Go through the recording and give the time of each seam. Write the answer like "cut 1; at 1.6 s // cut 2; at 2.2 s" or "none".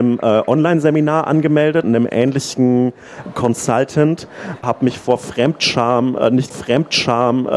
cut 1; at 1.8 s // cut 2; at 4.6 s // cut 3; at 6.5 s

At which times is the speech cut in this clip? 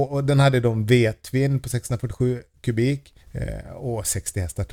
cut 1; at 3.2 s

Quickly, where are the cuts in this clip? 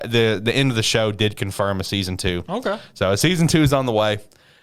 none

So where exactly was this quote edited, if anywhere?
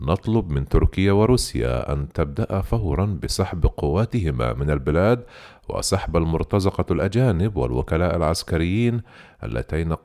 none

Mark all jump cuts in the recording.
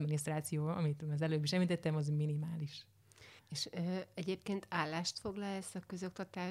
cut 1; at 3.4 s

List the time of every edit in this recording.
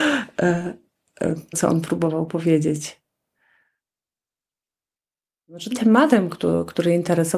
cut 1; at 1.5 s // cut 2; at 5.7 s

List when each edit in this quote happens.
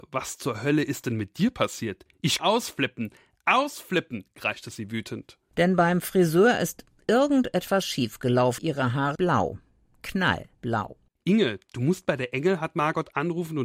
cut 1; at 2.4 s // cut 2; at 8.6 s // cut 3; at 9.2 s // cut 4; at 10.5 s

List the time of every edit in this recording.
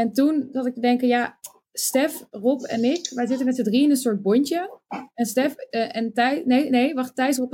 none

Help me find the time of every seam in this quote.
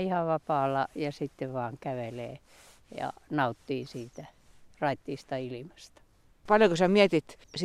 none

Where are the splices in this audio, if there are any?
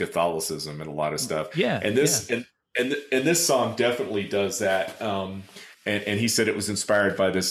cut 1; at 5.7 s

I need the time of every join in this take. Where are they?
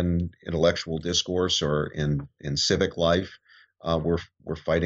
none

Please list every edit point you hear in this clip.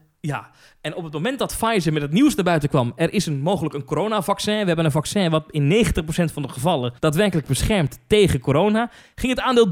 cut 1; at 7.0 s

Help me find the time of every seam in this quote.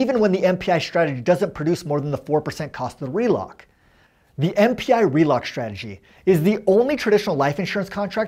none

